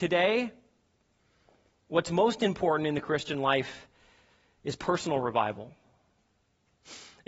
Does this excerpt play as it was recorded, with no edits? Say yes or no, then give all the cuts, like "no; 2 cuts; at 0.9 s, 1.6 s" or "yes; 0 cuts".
yes; 0 cuts